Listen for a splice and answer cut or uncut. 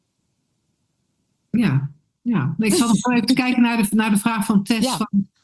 uncut